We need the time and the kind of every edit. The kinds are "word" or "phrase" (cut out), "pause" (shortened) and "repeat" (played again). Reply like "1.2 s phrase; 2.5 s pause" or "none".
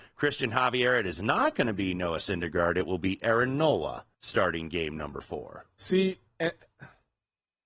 4.1 s pause